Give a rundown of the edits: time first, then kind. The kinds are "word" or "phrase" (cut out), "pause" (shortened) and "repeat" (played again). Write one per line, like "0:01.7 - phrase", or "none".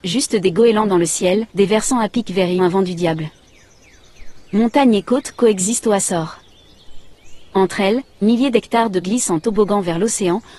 0:01.5 - pause
0:02.6 - phrase
0:08.2 - word
0:09.0 - word